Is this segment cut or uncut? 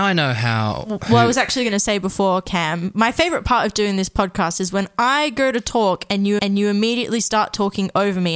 cut